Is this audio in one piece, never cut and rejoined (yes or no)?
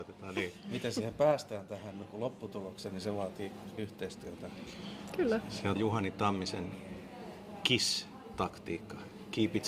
no